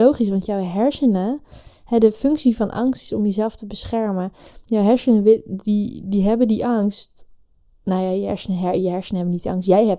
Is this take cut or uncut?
uncut